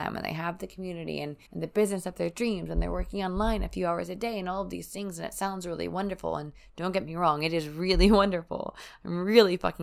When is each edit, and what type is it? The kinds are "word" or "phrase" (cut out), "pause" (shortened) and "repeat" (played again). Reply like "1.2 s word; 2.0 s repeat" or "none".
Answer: 1.5 s pause

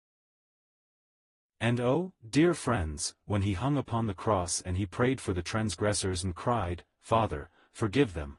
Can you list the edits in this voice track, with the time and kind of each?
none

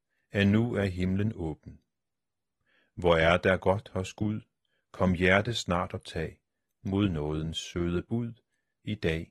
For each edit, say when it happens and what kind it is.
none

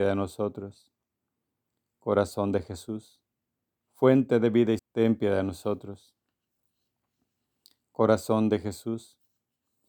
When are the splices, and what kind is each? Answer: 4.8 s word

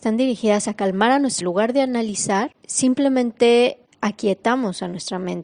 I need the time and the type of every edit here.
1.4 s phrase

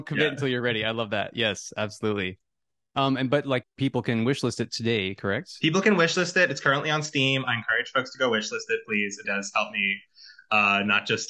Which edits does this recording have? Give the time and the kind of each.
3.6 s word; 9.2 s word

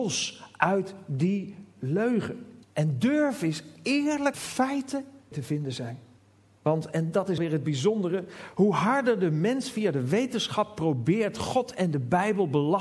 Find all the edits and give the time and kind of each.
2.6 s pause; 4.3 s phrase; 5.3 s phrase; 6.2 s pause; 7.4 s word

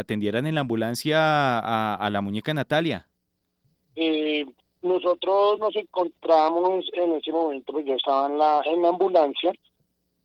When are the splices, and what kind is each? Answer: 4.6 s pause

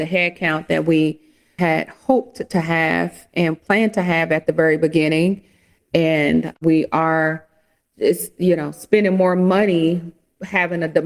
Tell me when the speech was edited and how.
none

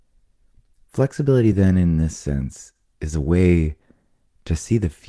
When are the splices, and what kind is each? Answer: none

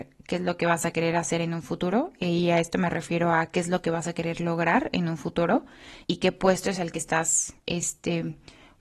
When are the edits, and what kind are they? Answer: 6.0 s pause; 7.6 s pause

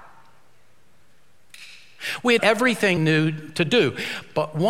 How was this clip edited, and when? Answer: 2.4 s word; 3.0 s word

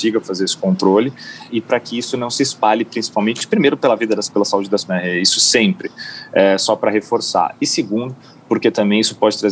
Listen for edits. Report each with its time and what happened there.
1.5 s word; 4.3 s word; 4.9 s word

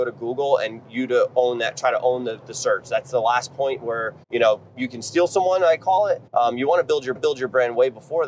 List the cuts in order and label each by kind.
4.2 s pause; 6.3 s pause; 7.2 s repeat

